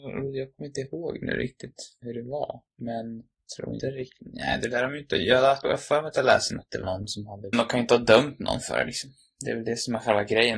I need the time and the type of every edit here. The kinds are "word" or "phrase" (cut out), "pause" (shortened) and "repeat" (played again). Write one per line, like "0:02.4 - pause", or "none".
0:02.0 - word
0:03.8 - word
0:05.6 - word
0:06.5 - word
0:06.8 - word
0:07.5 - phrase